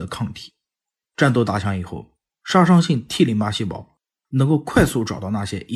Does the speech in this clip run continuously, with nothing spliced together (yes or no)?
yes